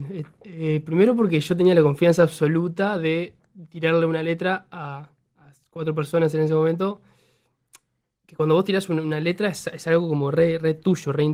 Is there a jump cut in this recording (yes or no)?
no